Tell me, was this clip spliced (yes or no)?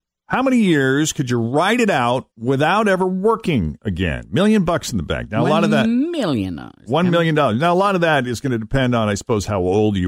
yes